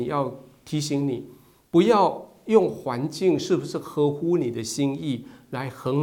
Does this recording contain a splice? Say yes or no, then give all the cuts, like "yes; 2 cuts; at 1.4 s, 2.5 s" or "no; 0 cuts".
no; 0 cuts